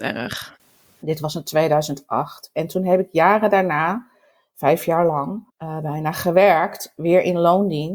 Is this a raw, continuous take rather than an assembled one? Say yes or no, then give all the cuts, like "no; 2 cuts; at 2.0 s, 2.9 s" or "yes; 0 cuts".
no; 1 cut; at 5.5 s